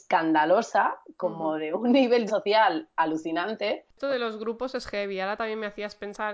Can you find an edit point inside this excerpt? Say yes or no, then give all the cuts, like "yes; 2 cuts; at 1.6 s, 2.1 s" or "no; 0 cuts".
yes; 1 cut; at 2.3 s